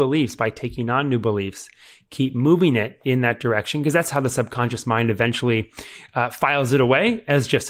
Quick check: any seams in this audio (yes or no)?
no